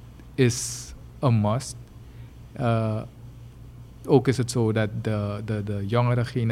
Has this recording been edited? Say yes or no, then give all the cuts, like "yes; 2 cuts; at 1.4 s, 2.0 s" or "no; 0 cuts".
no; 0 cuts